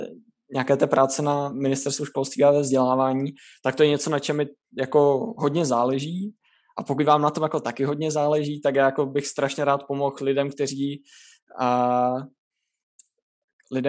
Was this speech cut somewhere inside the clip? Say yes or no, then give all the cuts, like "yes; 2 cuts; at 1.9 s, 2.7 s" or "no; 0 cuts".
no; 0 cuts